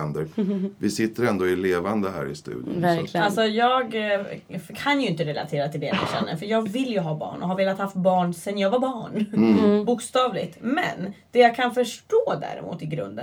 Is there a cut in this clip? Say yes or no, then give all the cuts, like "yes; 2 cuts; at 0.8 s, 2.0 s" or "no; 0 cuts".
no; 0 cuts